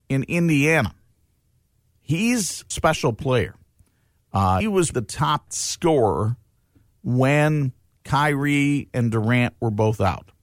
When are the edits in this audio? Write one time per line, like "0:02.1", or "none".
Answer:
0:02.7
0:04.6
0:04.9
0:05.5

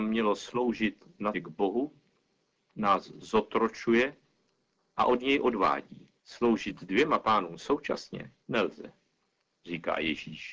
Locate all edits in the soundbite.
0:01.3
0:06.2
0:08.4

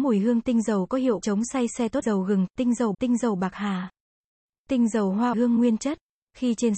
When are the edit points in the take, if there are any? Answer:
0:01.2
0:02.0
0:02.9
0:05.3

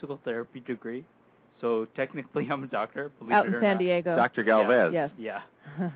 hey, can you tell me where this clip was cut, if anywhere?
none

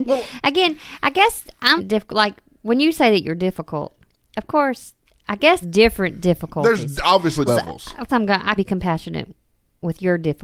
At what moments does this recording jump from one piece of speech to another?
0:01.8
0:05.6
0:07.5
0:08.1
0:08.6

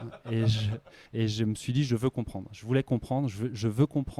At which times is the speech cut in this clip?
0:01.1

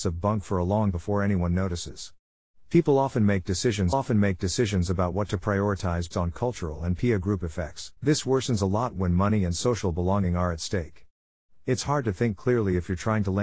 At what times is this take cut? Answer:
0:00.9
0:03.9
0:06.1
0:08.0

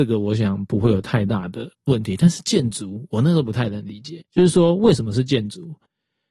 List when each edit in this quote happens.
0:01.7
0:04.3

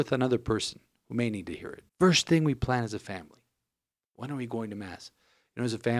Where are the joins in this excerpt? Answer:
0:01.9

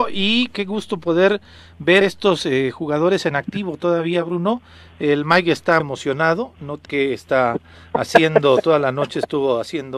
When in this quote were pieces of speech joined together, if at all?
0:02.0
0:05.8
0:06.8

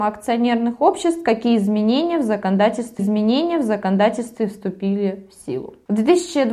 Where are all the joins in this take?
0:03.0

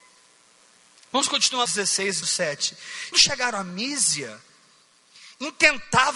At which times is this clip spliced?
0:01.7
0:02.2
0:03.1

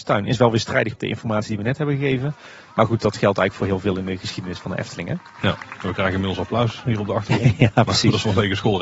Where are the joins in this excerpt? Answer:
0:01.0

